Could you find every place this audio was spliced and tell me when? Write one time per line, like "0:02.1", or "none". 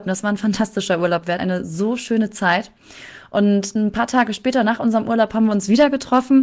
0:01.4

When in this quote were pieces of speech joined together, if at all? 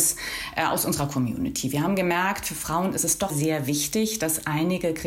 0:03.3

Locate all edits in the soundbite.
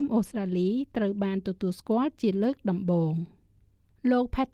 none

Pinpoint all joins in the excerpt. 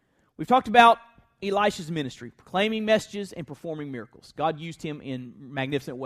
none

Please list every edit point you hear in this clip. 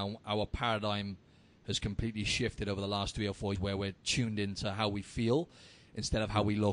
0:03.5

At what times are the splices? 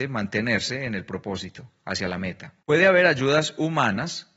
0:02.6

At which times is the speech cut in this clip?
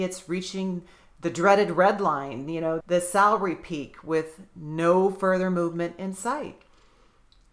0:02.8

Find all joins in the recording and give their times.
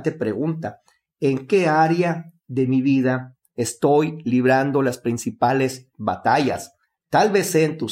none

